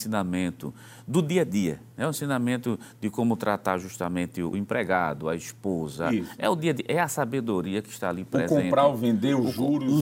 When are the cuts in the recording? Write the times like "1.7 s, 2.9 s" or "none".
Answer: 1.9 s, 4.5 s